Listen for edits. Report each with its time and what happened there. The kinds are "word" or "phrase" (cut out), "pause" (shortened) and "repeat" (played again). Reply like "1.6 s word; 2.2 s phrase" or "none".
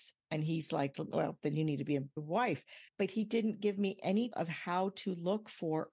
0.9 s word; 2.9 s pause; 4.3 s word